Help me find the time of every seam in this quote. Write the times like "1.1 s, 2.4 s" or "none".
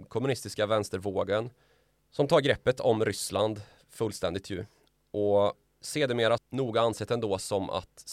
6.4 s